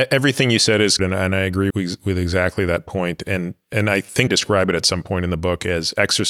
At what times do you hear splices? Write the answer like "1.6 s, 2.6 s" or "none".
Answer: 1.0 s, 1.7 s, 4.3 s